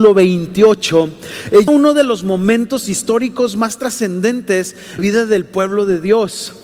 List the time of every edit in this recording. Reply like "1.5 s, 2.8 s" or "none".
1.7 s, 5.0 s